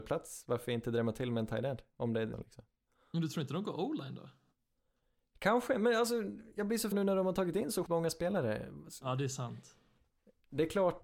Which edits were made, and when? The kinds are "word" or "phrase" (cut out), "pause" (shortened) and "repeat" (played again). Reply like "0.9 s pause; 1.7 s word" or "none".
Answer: 2.3 s word; 6.9 s word; 7.9 s word